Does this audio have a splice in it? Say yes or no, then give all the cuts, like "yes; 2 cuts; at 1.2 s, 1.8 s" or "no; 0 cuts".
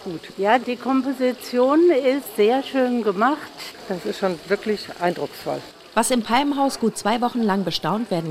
no; 0 cuts